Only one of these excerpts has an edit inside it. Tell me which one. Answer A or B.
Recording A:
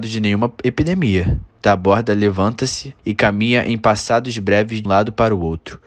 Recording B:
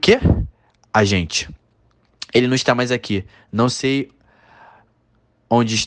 A